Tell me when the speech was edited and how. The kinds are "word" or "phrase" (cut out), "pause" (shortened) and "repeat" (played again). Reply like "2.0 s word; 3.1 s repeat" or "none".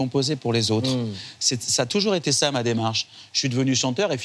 none